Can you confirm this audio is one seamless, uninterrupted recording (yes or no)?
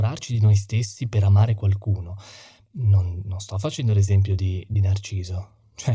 yes